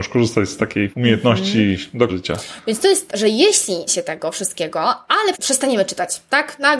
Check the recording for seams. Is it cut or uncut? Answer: cut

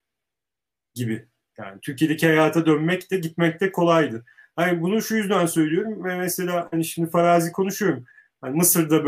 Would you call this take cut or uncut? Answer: uncut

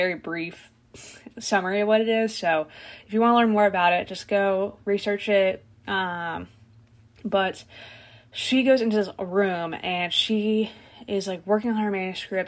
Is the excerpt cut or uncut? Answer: uncut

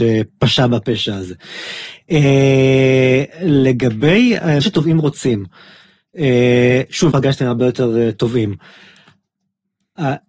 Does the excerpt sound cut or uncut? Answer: cut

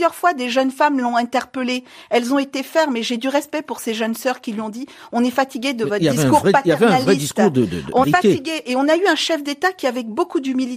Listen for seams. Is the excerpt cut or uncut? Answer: cut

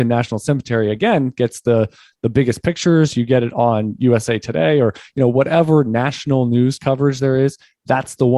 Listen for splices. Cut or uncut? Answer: uncut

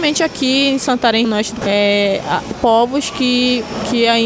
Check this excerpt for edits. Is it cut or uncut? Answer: cut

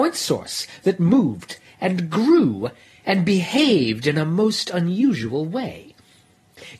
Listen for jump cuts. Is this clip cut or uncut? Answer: uncut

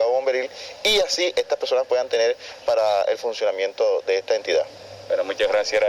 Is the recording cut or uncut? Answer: uncut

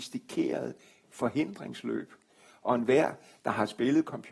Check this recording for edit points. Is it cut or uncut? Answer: uncut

